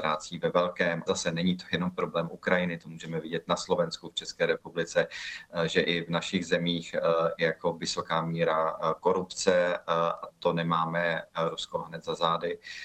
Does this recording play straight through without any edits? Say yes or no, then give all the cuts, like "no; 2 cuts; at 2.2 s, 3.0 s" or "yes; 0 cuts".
no; 1 cut; at 1.1 s